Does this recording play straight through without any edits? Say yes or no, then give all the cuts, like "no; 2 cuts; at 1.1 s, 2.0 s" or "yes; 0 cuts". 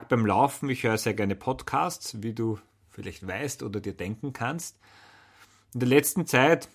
yes; 0 cuts